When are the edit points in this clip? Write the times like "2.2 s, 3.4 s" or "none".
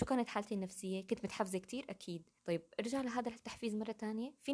2.4 s